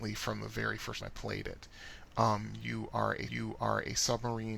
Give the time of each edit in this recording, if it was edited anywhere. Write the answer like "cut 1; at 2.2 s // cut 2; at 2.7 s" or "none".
cut 1; at 1.0 s // cut 2; at 3.3 s